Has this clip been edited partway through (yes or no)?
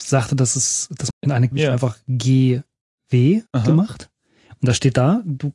yes